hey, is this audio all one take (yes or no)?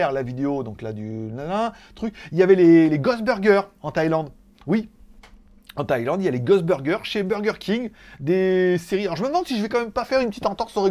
yes